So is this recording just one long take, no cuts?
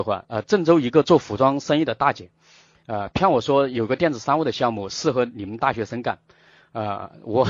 yes; 0 cuts

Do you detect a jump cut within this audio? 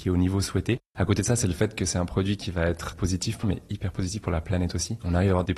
yes; 1 cut; at 3.4 s

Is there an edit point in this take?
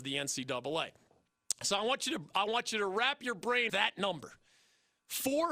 yes; 1 cut; at 3.7 s

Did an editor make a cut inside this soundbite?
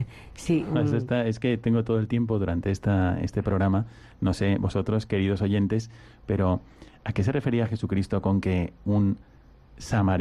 no; 0 cuts

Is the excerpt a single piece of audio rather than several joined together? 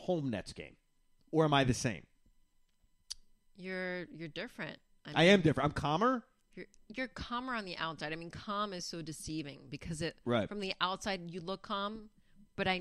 yes; 0 cuts

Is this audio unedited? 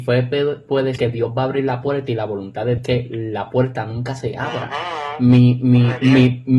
no; 2 cuts; at 1.0 s, 2.8 s

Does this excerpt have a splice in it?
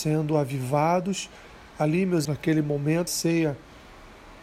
yes; 2 cuts; at 2.2 s, 3.1 s

